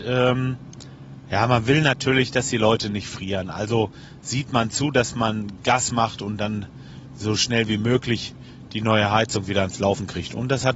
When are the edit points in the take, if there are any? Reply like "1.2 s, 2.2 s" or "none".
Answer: none

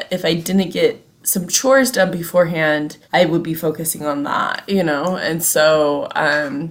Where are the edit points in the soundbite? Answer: 3.0 s

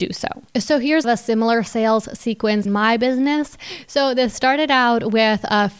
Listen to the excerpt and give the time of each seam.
1.0 s, 2.7 s

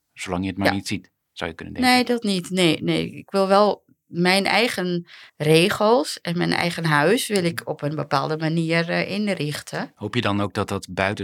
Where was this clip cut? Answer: 5.3 s

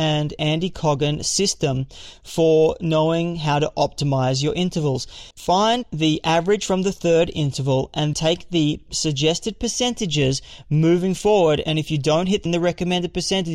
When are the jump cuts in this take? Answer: 5.3 s, 8.1 s, 12.5 s

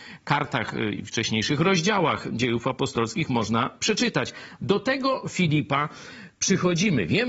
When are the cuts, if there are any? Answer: none

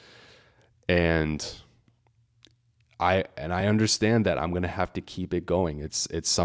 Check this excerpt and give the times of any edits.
none

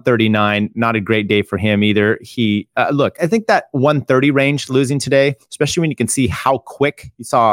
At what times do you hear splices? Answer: 3.2 s

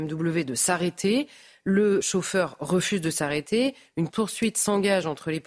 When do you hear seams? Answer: 2.0 s, 4.1 s

